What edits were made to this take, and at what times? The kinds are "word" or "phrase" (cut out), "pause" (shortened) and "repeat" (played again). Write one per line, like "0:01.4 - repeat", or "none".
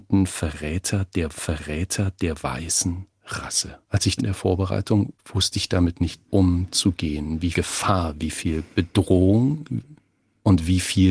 0:01.4 - repeat
0:03.8 - pause
0:04.2 - phrase
0:05.2 - pause
0:06.3 - pause
0:07.5 - word